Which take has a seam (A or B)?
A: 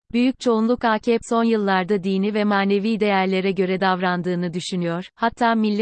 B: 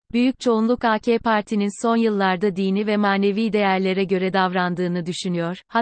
A